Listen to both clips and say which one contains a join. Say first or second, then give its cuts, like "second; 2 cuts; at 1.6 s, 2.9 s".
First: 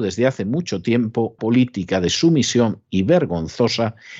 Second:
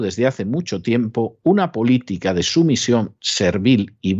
first; 2 cuts; at 1.4 s, 2.9 s